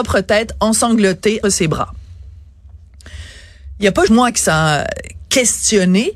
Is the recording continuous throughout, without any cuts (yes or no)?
no